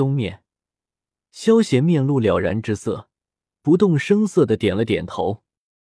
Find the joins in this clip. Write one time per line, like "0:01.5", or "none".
none